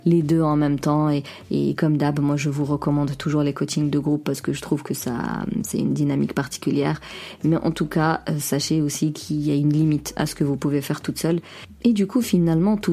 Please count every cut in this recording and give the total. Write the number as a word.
zero